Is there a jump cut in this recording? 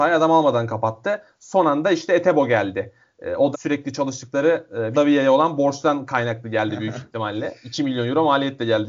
yes; 2 cuts; at 3.5 s, 4.9 s

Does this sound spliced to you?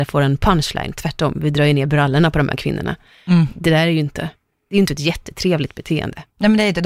no; 0 cuts

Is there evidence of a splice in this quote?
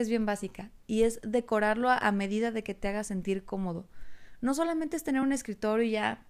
no; 0 cuts

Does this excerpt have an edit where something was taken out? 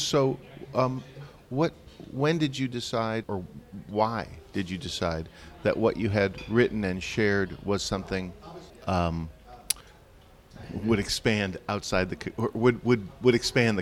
yes; 2 cuts; at 3.2 s, 8.7 s

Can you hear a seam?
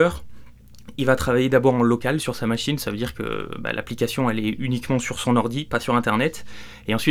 no; 0 cuts

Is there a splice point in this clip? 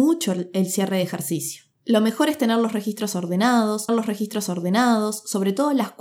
yes; 2 cuts; at 1.7 s, 3.9 s

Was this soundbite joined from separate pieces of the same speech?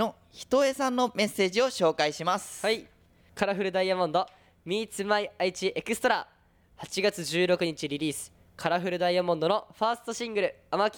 no; 0 cuts

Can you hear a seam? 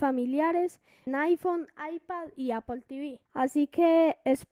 yes; 2 cuts; at 1.1 s, 3.3 s

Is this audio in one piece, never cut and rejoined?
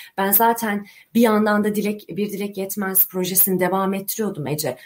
yes; 0 cuts

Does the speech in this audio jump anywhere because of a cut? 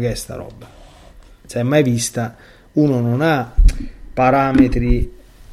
no; 0 cuts

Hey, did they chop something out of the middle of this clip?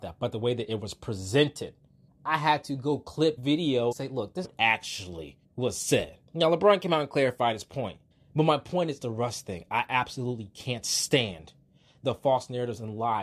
yes; 8 cuts; at 2.1 s, 3.4 s, 3.9 s, 4.4 s, 5.4 s, 6.3 s, 8.1 s, 9.0 s

